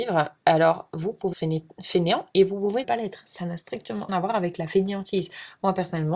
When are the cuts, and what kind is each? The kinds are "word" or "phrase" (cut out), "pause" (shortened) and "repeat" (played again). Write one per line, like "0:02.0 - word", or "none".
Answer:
0:01.3 - word
0:02.8 - word
0:04.1 - word